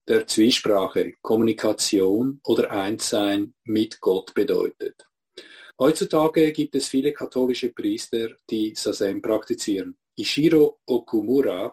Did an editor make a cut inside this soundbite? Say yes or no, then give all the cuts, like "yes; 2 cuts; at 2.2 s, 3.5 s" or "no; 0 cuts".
yes; 1 cut; at 5.7 s